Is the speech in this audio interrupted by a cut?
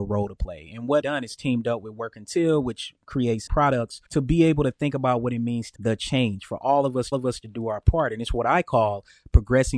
yes; 5 cuts; at 1.0 s, 3.5 s, 4.1 s, 5.8 s, 7.1 s

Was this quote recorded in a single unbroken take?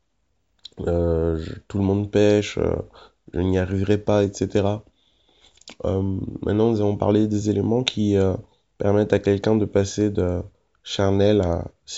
yes; 0 cuts

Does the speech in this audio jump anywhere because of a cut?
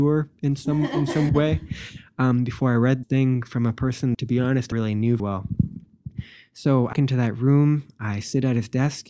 yes; 6 cuts; at 1.3 s, 3.0 s, 4.1 s, 4.7 s, 5.2 s, 6.9 s

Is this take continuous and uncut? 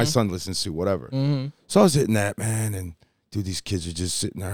yes; 0 cuts

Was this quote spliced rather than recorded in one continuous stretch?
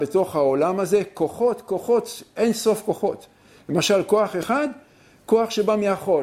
no; 0 cuts

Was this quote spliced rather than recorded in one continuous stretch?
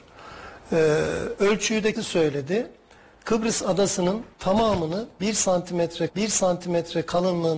yes; 3 cuts; at 2.0 s, 4.3 s, 6.1 s

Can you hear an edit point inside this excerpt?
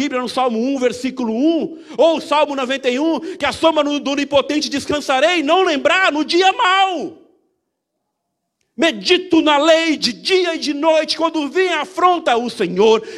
no; 0 cuts

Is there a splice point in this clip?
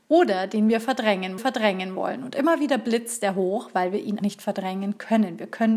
yes; 2 cuts; at 1.4 s, 4.2 s

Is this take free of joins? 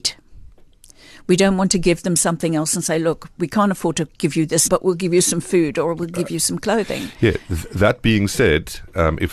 no; 1 cut; at 4.7 s

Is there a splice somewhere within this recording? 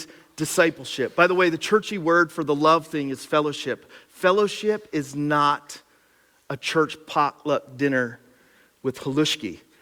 no; 0 cuts

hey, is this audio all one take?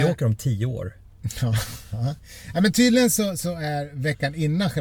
yes; 0 cuts

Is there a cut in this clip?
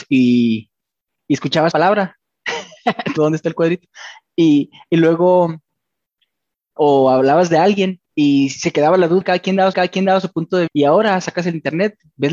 yes; 8 cuts; at 1.7 s, 2.2 s, 3.2 s, 6.8 s, 8.1 s, 9.2 s, 9.7 s, 10.7 s

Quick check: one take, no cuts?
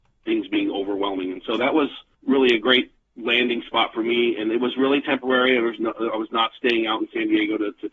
no; 2 cuts; at 2.1 s, 3.0 s

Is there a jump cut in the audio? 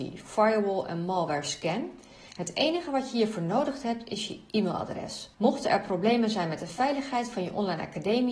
yes; 1 cut; at 5.3 s

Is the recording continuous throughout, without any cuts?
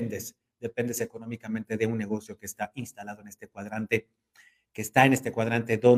yes; 0 cuts

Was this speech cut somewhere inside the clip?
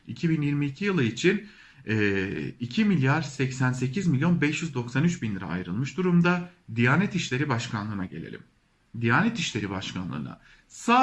no; 0 cuts

